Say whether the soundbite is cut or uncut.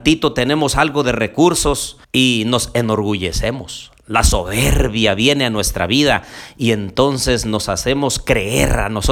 cut